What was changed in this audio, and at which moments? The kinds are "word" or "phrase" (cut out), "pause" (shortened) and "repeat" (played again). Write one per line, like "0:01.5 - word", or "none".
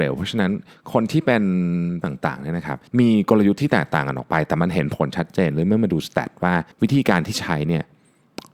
0:02.0 - word
0:02.9 - pause
0:06.7 - pause